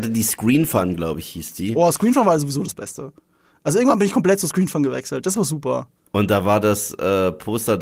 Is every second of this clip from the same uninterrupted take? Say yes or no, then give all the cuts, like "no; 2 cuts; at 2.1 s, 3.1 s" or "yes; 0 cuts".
yes; 0 cuts